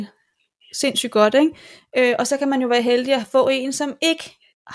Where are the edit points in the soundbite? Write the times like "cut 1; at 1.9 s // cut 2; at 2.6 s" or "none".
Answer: none